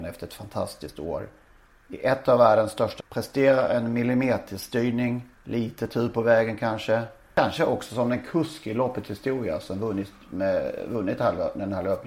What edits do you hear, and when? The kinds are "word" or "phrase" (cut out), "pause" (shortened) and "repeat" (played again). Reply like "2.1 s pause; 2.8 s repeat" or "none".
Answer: 3.0 s word; 5.4 s pause